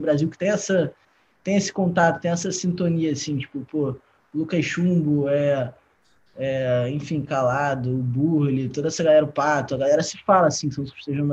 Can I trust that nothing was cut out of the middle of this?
yes; 0 cuts

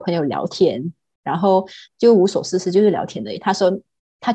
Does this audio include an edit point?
no; 0 cuts

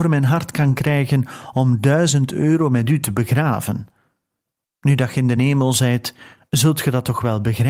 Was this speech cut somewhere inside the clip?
no; 0 cuts

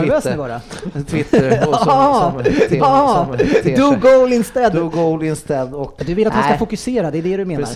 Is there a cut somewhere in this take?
yes; 2 cuts; at 2.8 s, 6.0 s

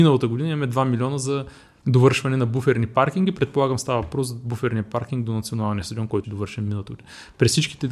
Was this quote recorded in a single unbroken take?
no; 1 cut; at 6.2 s

